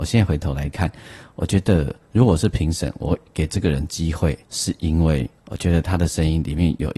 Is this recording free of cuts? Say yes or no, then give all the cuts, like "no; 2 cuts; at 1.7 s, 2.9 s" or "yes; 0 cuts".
no; 2 cuts; at 4.4 s, 5.4 s